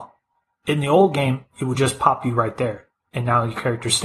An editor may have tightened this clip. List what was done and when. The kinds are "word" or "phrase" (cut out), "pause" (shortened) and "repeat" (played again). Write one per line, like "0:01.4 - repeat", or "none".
none

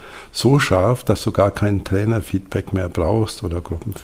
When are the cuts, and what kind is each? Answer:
none

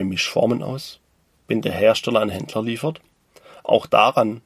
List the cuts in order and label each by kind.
none

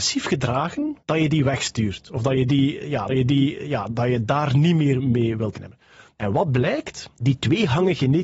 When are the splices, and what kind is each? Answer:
0:01.0 - pause
0:03.1 - repeat
0:05.5 - word
0:07.1 - pause

